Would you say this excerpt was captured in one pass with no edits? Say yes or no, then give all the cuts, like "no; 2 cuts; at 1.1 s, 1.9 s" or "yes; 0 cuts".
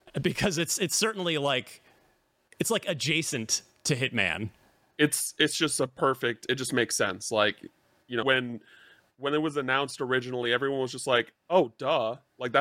no; 1 cut; at 8.2 s